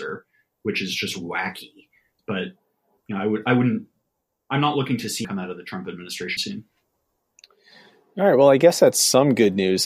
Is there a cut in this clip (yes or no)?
yes